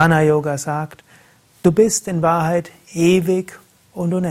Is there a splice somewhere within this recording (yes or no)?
no